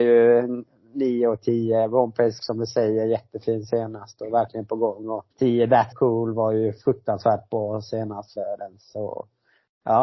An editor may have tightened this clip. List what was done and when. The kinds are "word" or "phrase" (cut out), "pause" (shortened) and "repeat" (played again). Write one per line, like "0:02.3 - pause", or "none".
0:02.4 - word
0:05.3 - pause
0:05.9 - word
0:08.4 - word